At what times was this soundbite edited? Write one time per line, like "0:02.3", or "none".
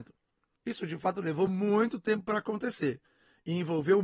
none

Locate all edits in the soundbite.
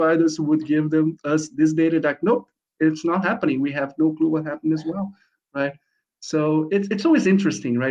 none

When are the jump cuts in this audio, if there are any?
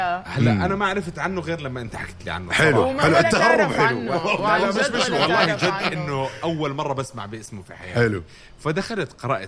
none

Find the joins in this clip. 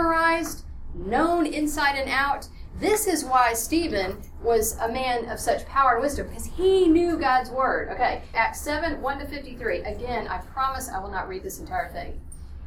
0:08.3

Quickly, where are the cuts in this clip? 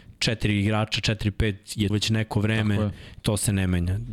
0:01.9
0:03.2

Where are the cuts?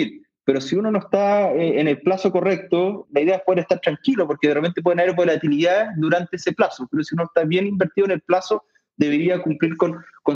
0:03.0

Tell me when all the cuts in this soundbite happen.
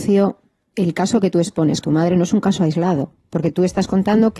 0:01.8

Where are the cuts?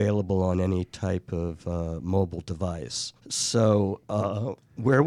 0:03.2

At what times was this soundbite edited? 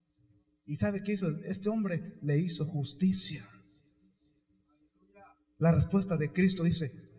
none

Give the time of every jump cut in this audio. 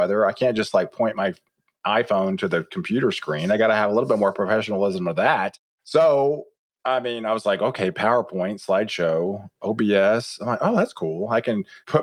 none

